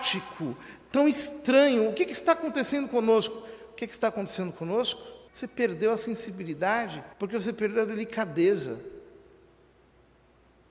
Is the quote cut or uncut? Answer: cut